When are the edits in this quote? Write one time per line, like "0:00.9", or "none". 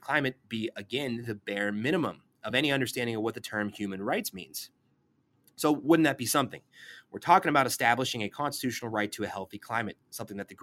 none